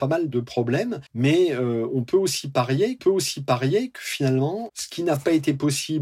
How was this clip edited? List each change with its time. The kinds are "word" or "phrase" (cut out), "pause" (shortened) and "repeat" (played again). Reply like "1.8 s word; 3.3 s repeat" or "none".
1.1 s pause; 3.0 s repeat